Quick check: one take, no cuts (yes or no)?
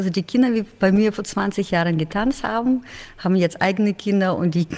yes